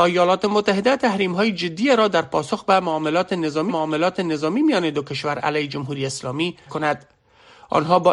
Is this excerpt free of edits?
no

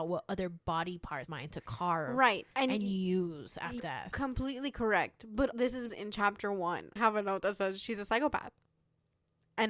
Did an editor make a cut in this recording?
yes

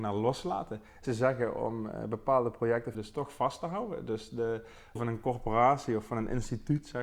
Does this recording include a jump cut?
yes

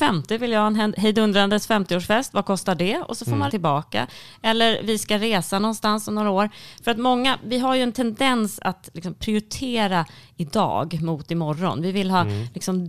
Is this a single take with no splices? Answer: no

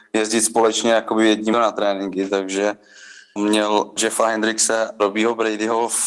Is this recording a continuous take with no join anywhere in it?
no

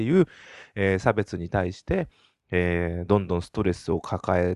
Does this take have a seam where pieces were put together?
no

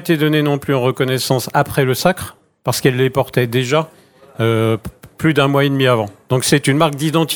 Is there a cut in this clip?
no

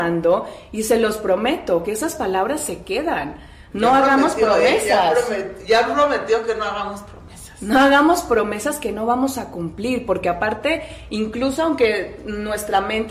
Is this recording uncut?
yes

